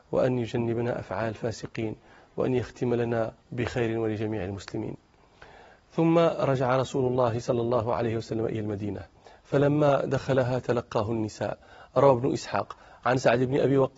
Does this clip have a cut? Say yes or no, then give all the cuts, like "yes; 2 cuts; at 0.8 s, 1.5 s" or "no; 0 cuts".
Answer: yes; 1 cut; at 3.4 s